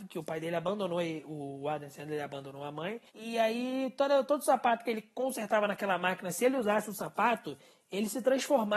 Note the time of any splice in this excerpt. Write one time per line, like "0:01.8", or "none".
0:03.1

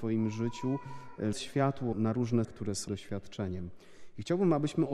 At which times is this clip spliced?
0:01.3
0:01.9
0:02.4
0:02.9

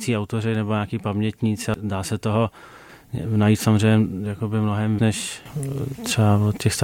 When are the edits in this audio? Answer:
0:05.0

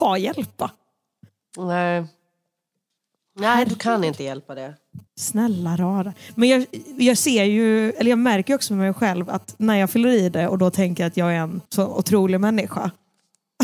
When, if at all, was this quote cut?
0:05.1
0:11.7

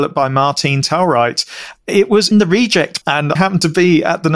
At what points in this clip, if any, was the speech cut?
0:02.3
0:03.0
0:03.3

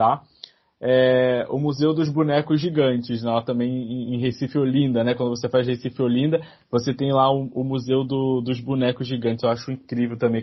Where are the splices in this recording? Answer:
none

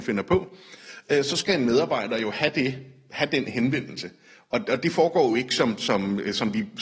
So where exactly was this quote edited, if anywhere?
none

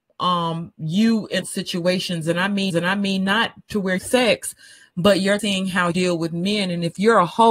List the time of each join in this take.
0:01.4
0:02.7
0:04.0
0:05.4
0:05.9

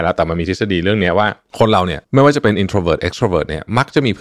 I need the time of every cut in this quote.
0:02.0

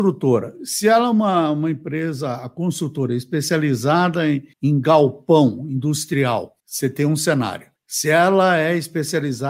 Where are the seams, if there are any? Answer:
0:04.5
0:06.6
0:07.8

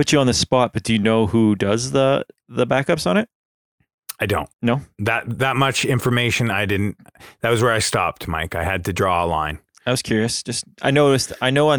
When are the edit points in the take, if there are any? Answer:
0:04.5
0:10.7

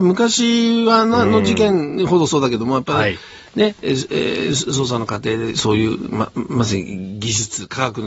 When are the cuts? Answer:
none

